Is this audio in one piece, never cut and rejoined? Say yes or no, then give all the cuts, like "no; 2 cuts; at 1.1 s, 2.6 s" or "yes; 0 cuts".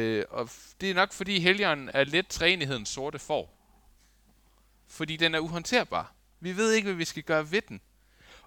yes; 0 cuts